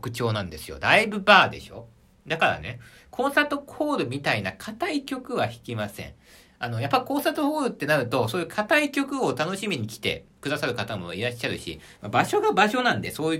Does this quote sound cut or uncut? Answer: uncut